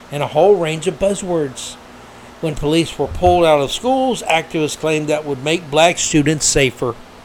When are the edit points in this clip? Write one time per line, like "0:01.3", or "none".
none